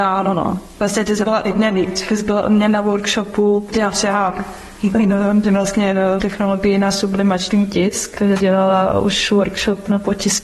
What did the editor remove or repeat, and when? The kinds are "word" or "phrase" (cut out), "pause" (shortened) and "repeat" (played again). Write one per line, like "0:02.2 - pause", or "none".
0:03.7 - word
0:06.2 - word
0:08.4 - word